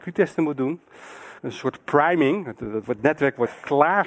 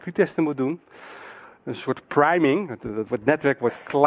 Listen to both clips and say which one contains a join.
first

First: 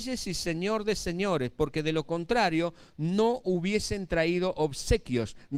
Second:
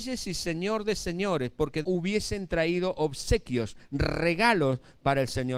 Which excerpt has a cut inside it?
second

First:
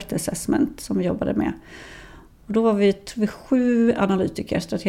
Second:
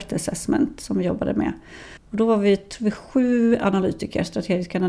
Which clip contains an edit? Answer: second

